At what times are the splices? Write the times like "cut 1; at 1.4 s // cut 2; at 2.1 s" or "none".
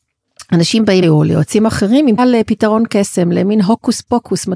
cut 1; at 1.0 s // cut 2; at 2.2 s